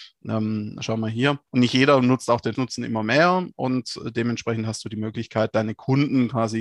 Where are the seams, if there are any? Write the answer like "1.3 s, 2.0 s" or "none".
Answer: 1.5 s, 2.6 s